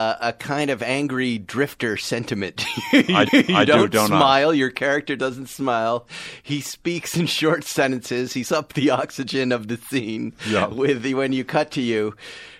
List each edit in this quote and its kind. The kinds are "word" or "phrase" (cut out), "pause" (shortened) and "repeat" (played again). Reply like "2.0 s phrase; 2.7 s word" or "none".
3.3 s repeat; 8.4 s word